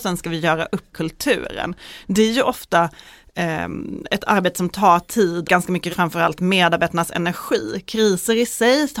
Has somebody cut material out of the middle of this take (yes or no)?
yes